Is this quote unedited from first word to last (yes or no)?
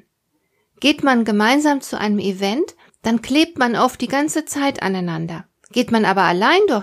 no